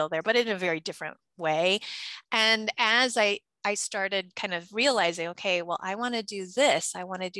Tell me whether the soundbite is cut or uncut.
uncut